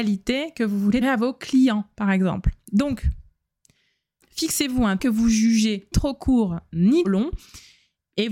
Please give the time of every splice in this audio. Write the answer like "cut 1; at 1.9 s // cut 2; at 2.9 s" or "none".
cut 1; at 1.0 s // cut 2; at 4.2 s // cut 3; at 5.0 s // cut 4; at 5.9 s // cut 5; at 7.0 s